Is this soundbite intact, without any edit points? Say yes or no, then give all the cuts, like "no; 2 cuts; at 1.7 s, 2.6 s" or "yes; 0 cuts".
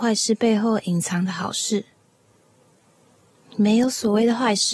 yes; 0 cuts